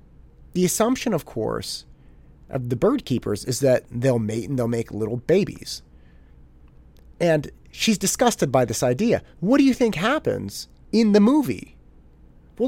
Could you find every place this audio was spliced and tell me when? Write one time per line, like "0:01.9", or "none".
0:09.3